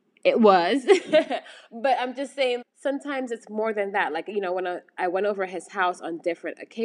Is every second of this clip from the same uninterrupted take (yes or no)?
no